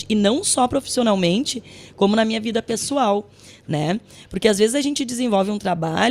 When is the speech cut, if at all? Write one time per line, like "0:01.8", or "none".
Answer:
none